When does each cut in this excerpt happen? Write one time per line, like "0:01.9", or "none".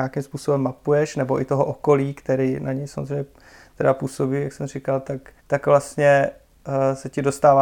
0:05.4